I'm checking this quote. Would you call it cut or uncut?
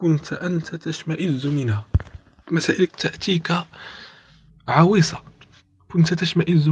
cut